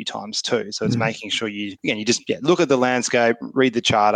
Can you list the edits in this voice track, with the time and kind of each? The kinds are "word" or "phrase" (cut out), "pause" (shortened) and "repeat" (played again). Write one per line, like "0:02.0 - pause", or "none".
0:01.8 - pause